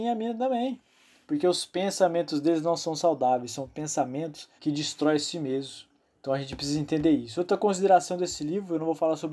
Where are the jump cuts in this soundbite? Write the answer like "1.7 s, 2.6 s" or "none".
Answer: 4.6 s, 6.0 s